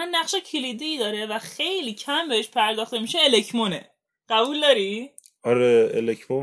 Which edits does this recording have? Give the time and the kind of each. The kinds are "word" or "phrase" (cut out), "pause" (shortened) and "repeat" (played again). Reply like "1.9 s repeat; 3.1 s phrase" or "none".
none